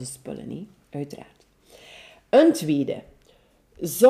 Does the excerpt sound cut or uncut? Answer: uncut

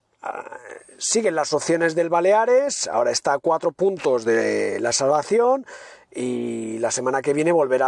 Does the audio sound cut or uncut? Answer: uncut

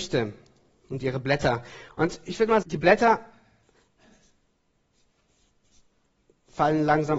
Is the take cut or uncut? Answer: cut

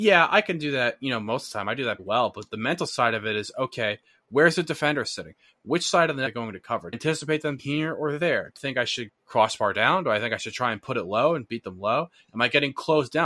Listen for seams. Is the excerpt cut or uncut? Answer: cut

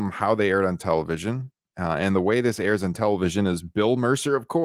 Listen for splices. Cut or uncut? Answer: uncut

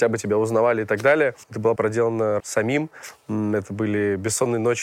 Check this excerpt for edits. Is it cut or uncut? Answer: cut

